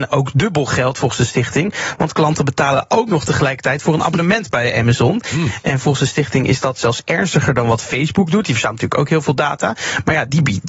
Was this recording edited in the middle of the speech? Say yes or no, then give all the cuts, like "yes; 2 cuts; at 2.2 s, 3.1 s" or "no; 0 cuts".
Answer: no; 0 cuts